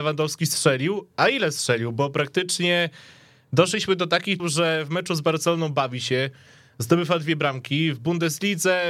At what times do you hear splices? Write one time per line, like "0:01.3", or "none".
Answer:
0:04.4